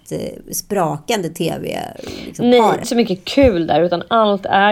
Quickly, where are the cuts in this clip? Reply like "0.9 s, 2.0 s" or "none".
2.8 s

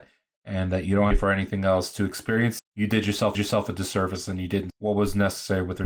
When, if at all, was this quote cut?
1.1 s, 2.6 s, 3.3 s, 4.7 s

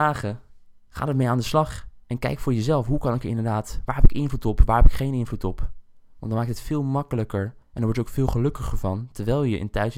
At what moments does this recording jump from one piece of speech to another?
7.6 s

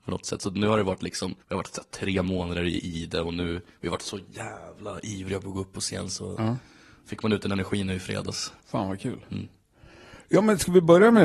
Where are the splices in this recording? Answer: 1.4 s, 8.6 s

